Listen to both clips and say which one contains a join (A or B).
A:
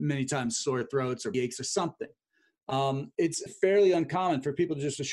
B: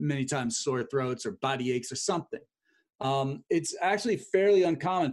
A